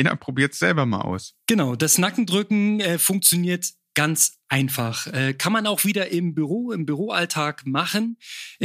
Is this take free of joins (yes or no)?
yes